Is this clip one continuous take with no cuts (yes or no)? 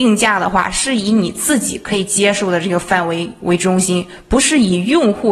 yes